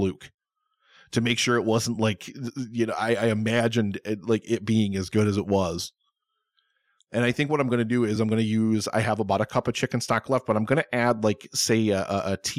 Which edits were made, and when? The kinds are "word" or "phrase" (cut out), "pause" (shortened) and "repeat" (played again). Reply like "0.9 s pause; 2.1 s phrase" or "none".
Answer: none